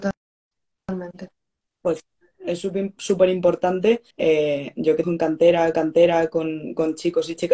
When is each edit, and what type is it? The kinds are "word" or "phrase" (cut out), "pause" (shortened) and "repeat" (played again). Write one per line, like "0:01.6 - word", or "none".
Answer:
0:01.7 - pause
0:04.1 - pause
0:05.0 - word
0:05.7 - repeat